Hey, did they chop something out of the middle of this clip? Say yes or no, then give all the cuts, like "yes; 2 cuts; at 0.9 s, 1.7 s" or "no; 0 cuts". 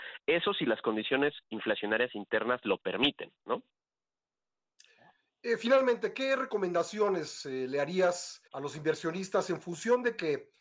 yes; 2 cuts; at 3.4 s, 8.5 s